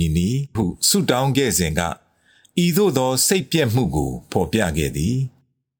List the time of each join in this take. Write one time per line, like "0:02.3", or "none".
none